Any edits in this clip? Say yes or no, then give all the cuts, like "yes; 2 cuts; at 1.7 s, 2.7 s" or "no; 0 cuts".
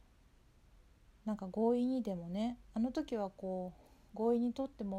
no; 0 cuts